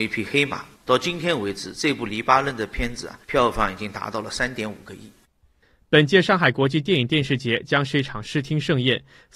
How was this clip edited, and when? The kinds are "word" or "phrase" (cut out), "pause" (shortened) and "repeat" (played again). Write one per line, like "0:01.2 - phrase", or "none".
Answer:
0:03.2 - pause